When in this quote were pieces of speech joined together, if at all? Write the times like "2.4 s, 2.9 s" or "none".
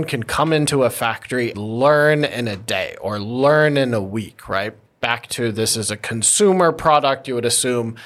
1.5 s

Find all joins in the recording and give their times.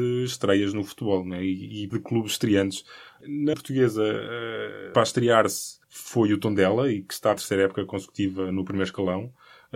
1.9 s, 3.5 s, 4.9 s, 5.8 s, 7.4 s

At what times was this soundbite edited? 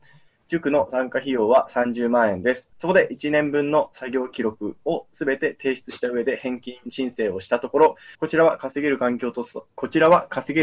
2.7 s, 8.1 s, 9.7 s

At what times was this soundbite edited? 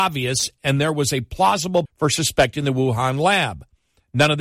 1.9 s

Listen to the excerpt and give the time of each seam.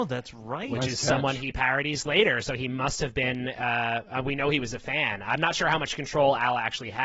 none

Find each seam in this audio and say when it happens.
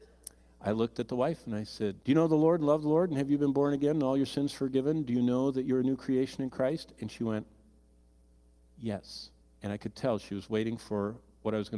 2.0 s, 9.4 s

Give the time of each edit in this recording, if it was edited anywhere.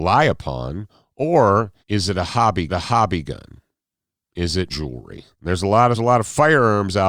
1.8 s, 2.7 s, 4.7 s, 5.3 s, 5.9 s

